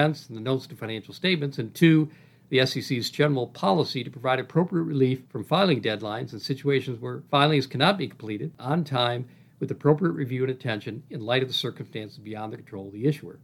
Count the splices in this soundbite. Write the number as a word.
zero